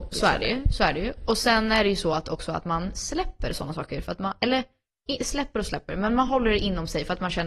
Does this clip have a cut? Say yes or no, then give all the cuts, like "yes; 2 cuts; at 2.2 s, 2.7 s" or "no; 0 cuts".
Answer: no; 0 cuts